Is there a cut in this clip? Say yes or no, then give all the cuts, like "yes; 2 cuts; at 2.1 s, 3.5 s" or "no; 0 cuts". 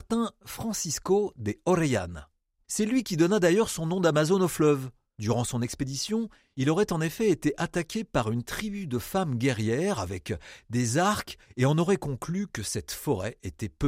no; 0 cuts